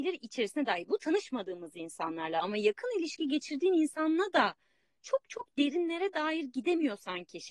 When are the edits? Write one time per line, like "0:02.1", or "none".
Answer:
none